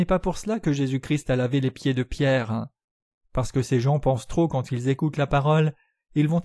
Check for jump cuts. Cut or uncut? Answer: uncut